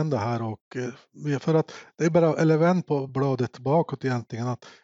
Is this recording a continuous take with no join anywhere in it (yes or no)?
yes